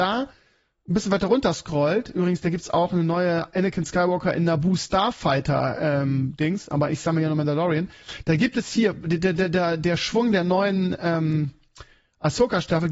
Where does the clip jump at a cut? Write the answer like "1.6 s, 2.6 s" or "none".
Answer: none

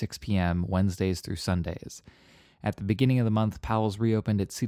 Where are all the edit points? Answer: none

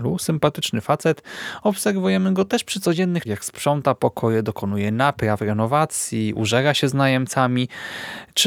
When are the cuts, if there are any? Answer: 3.2 s

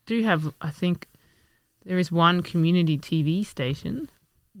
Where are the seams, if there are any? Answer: none

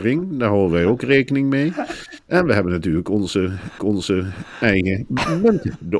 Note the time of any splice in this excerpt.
3.8 s

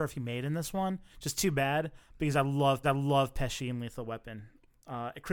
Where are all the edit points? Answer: 1.1 s, 2.8 s

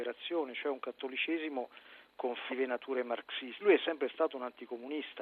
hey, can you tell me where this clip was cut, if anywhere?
2.5 s, 3.6 s

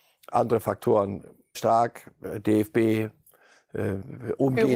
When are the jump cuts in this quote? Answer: 1.5 s

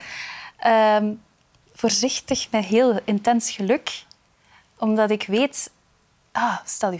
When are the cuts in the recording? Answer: none

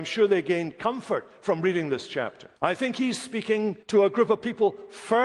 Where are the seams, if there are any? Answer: 2.6 s, 3.8 s

